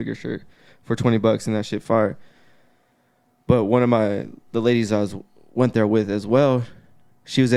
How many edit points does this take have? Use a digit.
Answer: 1